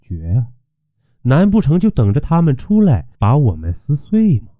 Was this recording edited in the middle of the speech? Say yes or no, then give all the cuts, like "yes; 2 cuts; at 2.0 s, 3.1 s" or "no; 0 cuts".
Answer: yes; 1 cut; at 3.1 s